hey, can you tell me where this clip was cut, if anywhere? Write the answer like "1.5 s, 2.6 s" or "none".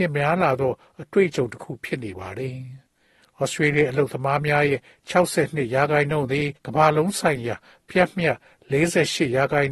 6.6 s